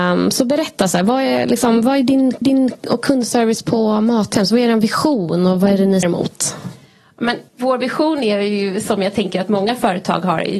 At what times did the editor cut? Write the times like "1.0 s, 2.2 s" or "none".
2.4 s, 6.0 s, 7.5 s